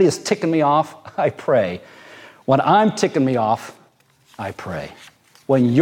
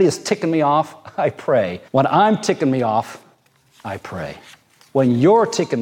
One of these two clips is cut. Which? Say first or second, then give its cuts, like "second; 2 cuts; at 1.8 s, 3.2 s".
second; 1 cut; at 1.9 s